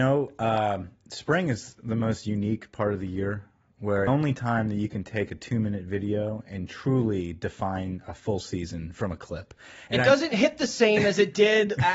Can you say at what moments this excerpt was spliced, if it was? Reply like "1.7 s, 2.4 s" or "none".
4.1 s